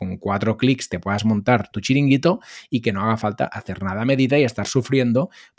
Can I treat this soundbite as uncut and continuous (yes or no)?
no